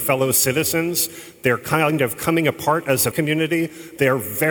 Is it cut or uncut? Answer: cut